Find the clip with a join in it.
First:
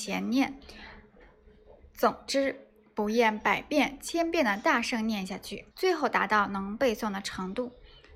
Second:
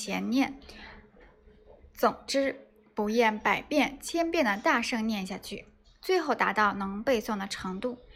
first; 1 cut; at 5.7 s

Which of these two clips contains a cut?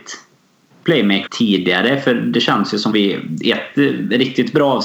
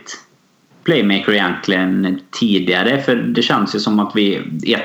first; 2 cuts; at 1.3 s, 2.9 s

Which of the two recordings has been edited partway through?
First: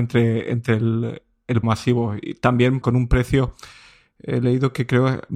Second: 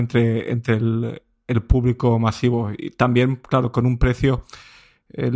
first; 2 cuts; at 1.6 s, 2.8 s

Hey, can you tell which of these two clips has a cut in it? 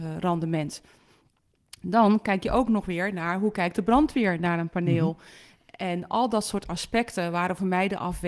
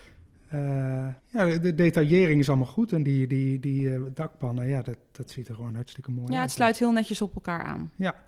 second; 1 cut; at 1.2 s

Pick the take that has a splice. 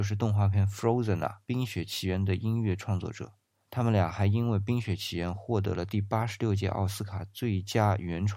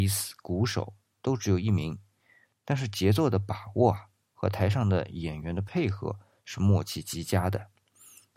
first; 1 cut; at 1.4 s

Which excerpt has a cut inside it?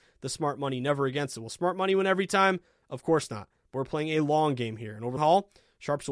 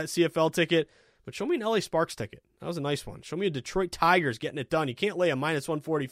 first; 1 cut; at 5.2 s

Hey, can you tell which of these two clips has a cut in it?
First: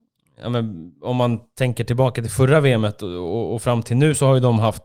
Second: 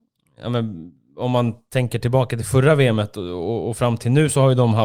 first; 1 cut; at 0.9 s

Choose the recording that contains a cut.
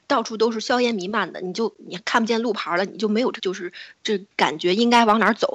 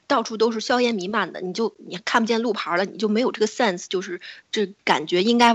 first; 1 cut; at 3.4 s

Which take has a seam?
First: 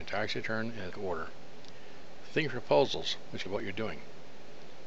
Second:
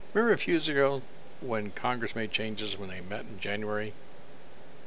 first; 2 cuts; at 0.9 s, 3.5 s

